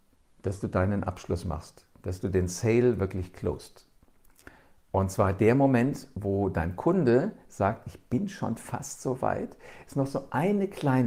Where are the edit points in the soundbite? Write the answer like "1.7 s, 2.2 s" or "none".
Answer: none